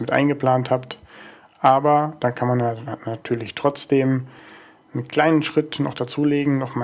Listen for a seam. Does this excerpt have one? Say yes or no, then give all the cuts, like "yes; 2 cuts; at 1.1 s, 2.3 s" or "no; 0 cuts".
no; 0 cuts